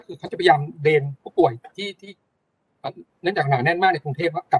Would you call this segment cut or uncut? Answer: uncut